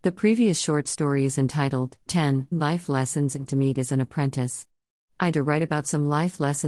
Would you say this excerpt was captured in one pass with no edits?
no; 4 cuts; at 2.1 s, 2.5 s, 3.5 s, 5.3 s

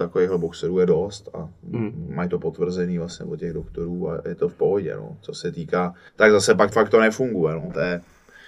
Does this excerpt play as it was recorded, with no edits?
no; 2 cuts; at 6.1 s, 6.7 s

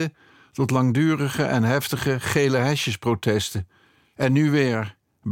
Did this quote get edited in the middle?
no; 0 cuts

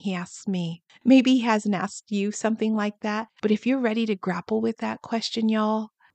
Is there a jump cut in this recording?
yes; 1 cut; at 3.4 s

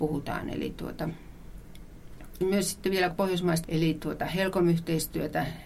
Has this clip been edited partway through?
yes; 3 cuts; at 2.4 s, 3.1 s, 3.6 s

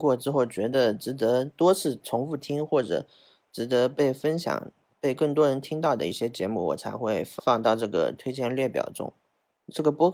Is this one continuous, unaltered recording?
yes; 0 cuts

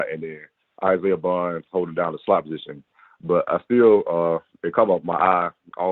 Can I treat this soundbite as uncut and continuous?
yes; 0 cuts

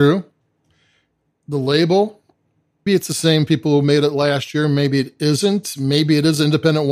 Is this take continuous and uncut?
no; 1 cut; at 2.9 s

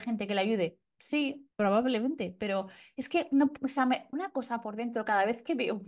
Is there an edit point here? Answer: yes; 2 cuts; at 1.5 s, 4.1 s

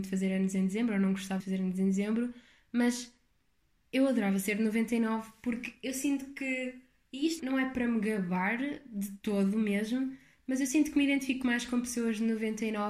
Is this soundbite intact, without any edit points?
no; 3 cuts; at 1.4 s, 7.4 s, 11.4 s

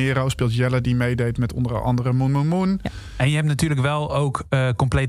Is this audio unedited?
yes; 0 cuts

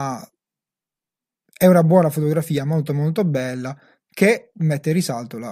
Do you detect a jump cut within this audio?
no; 0 cuts

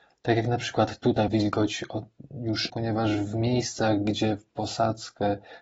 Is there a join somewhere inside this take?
yes; 2 cuts; at 1.3 s, 2.7 s

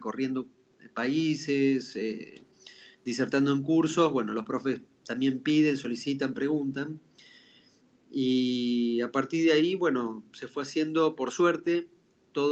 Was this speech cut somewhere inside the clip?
no; 0 cuts

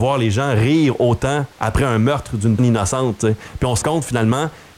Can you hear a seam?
yes; 3 cuts; at 1.5 s, 2.6 s, 3.8 s

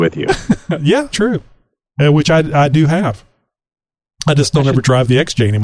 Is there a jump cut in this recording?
yes; 1 cut; at 1.1 s

